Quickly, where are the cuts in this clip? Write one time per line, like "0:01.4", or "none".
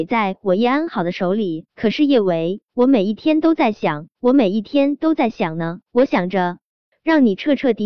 0:01.7
0:02.7
0:04.1
0:05.9